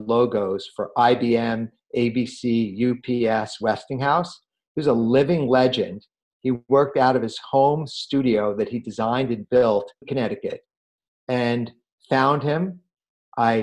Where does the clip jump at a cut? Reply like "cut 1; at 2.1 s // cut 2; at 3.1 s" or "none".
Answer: cut 1; at 10.0 s // cut 2; at 12.0 s